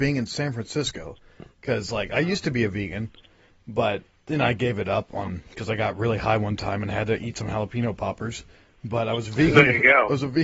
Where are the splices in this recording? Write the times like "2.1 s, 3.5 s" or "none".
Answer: none